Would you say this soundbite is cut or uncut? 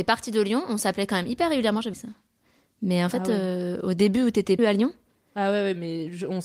cut